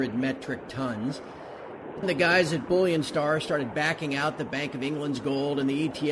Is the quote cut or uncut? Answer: cut